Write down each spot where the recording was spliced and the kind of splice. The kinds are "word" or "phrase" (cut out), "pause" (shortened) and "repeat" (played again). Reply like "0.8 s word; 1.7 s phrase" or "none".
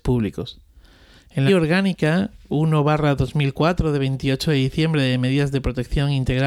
1.5 s word